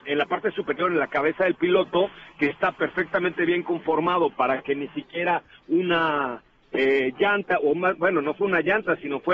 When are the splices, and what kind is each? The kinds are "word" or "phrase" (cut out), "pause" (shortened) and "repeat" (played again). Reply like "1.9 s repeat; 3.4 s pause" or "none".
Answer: none